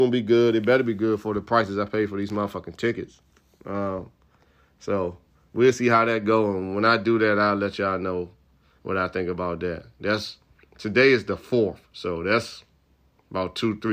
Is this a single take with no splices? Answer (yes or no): yes